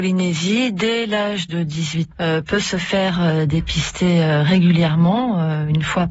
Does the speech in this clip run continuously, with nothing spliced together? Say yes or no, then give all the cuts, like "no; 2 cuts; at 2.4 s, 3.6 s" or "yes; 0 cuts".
no; 1 cut; at 2.1 s